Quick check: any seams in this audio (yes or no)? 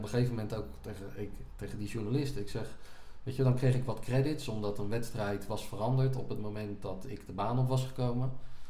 no